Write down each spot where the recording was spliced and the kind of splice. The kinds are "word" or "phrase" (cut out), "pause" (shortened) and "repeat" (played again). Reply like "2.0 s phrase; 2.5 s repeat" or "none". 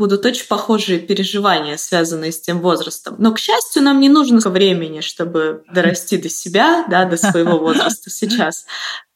4.4 s word